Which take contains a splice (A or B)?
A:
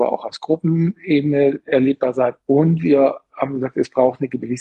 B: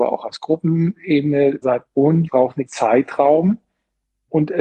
B